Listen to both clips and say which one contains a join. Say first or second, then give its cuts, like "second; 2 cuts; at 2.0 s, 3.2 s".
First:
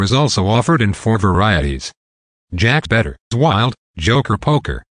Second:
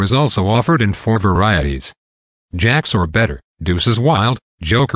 first; 2 cuts; at 2.9 s, 3.3 s